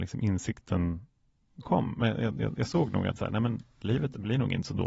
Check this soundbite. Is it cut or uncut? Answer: cut